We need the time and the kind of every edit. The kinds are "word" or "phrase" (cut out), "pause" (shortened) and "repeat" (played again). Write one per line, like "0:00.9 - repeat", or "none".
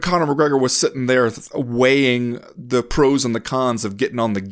none